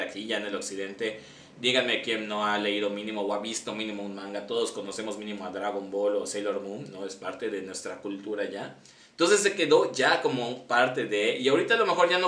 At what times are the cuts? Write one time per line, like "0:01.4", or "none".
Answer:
none